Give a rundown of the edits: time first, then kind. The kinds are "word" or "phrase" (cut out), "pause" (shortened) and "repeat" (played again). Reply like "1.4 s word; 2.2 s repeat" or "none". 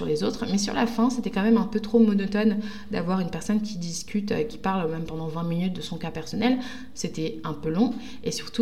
none